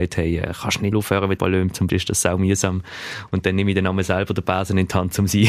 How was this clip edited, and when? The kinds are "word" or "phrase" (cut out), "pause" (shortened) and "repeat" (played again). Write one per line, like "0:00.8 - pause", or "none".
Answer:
0:00.9 - word
0:01.4 - word
0:01.9 - word